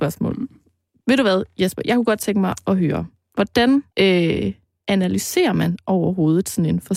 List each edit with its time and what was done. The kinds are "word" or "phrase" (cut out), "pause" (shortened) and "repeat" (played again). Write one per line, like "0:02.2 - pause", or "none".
0:03.9 - pause